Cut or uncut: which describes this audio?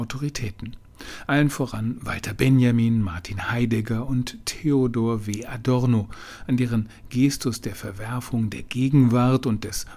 uncut